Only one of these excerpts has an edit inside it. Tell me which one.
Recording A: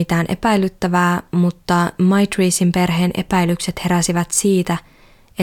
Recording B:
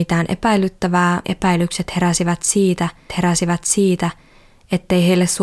B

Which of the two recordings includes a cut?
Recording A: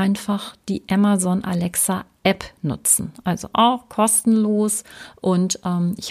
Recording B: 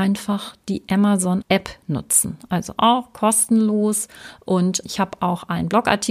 B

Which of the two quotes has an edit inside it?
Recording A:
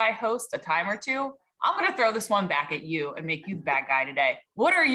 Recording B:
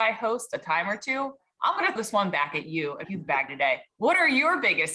B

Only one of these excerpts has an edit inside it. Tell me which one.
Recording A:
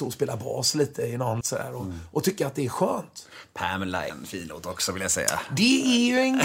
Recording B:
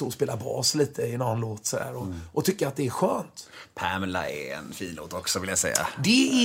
A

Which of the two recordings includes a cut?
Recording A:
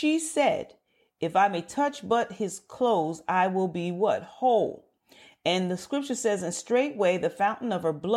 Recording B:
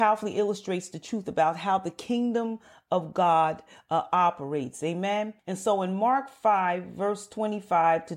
B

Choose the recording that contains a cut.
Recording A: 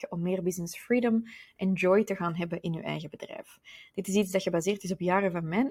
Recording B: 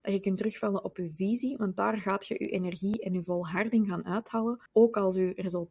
B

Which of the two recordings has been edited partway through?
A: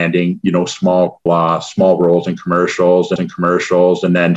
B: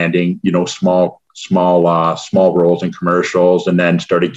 A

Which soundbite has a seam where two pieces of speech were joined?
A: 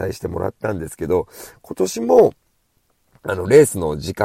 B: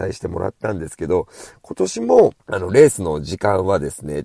B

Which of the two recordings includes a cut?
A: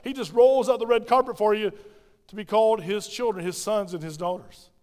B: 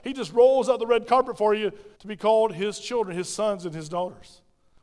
B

